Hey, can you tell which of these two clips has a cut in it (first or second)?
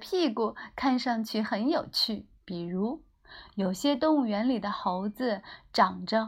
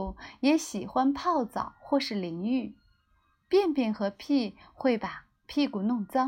first